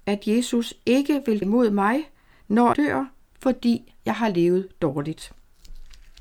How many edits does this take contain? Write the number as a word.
two